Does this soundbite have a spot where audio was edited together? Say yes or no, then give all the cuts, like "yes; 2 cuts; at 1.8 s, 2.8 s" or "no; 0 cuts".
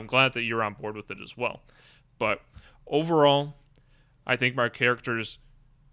no; 0 cuts